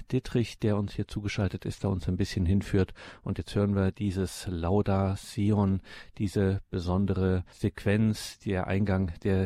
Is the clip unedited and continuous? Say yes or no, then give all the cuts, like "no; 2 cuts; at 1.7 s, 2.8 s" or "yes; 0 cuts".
yes; 0 cuts